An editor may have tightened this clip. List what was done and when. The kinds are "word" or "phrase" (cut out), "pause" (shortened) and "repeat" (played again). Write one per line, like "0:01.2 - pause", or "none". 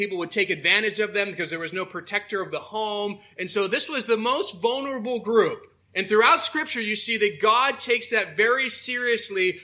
0:05.8 - pause